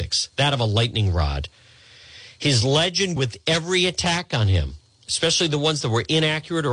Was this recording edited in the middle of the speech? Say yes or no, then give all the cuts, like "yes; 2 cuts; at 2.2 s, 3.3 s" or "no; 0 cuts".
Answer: yes; 1 cut; at 3.2 s